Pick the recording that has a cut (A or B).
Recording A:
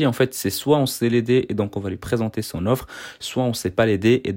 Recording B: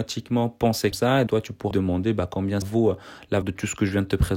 B